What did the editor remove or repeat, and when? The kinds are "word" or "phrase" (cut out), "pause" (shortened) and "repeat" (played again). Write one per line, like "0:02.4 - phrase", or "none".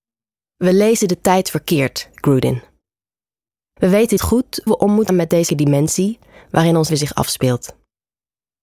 0:02.1 - word
0:04.2 - word
0:04.7 - word
0:05.1 - word
0:05.5 - word
0:06.9 - word